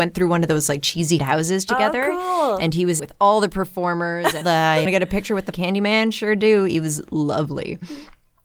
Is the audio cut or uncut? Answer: cut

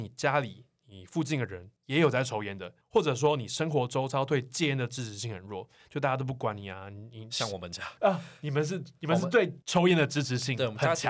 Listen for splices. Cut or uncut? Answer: cut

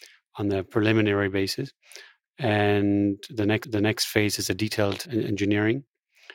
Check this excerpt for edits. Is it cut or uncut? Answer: cut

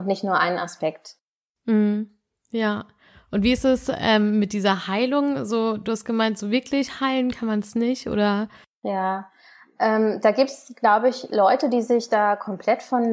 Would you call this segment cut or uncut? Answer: uncut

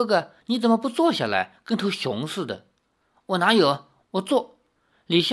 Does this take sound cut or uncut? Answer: uncut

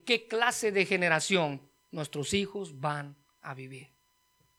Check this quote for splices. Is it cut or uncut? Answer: uncut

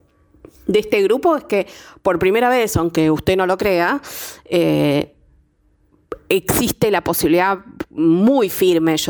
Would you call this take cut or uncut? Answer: uncut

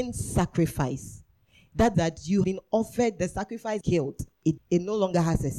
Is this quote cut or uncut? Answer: cut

